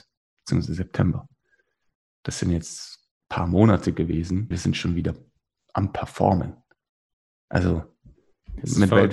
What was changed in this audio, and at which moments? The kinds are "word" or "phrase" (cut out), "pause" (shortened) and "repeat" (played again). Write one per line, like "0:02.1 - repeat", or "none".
0:04.5 - word